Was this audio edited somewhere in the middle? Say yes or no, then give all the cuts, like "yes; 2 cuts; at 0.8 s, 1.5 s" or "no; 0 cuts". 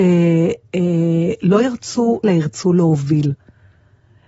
yes; 1 cut; at 2.2 s